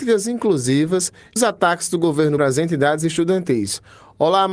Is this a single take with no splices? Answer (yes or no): no